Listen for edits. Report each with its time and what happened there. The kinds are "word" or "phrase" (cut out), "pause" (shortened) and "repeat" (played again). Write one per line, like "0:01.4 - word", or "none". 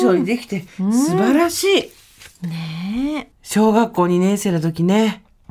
0:03.3 - pause